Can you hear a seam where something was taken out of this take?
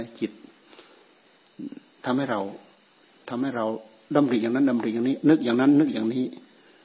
no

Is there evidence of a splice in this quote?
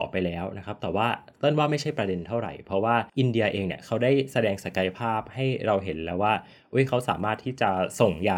yes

